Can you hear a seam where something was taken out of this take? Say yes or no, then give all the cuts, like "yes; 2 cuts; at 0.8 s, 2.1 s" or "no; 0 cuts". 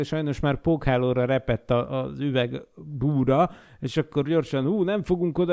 no; 0 cuts